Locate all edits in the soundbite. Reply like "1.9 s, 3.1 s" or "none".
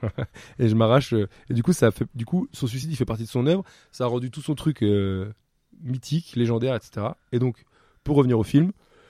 none